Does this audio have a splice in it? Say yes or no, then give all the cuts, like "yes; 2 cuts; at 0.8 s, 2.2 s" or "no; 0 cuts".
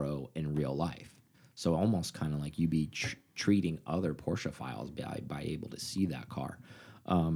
no; 0 cuts